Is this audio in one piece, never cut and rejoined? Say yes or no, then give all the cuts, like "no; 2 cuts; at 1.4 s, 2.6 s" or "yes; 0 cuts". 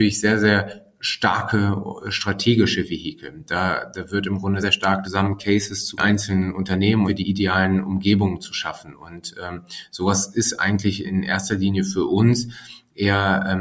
no; 5 cuts; at 4.6 s, 5.0 s, 6.0 s, 7.1 s, 11.0 s